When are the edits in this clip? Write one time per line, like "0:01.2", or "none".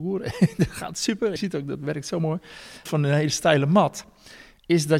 0:01.4
0:02.9